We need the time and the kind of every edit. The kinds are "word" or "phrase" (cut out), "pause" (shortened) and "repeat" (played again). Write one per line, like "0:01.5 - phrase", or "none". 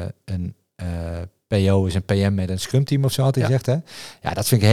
none